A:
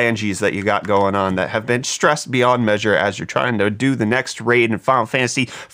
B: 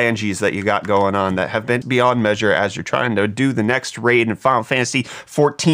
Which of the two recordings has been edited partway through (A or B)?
B